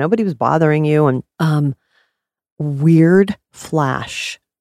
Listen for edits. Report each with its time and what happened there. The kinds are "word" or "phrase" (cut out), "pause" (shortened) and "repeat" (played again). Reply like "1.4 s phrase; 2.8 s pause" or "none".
1.3 s pause